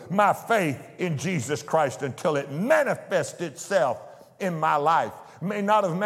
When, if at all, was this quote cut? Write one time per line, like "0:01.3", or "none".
none